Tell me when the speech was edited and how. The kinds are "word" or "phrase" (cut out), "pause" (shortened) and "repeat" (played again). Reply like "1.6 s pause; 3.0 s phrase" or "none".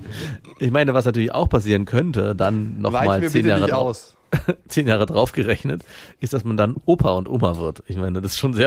none